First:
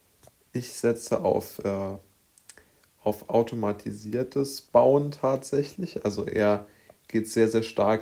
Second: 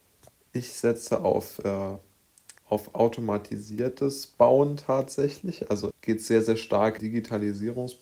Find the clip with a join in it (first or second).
second